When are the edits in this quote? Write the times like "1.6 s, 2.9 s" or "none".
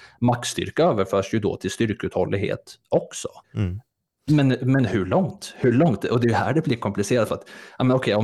3.4 s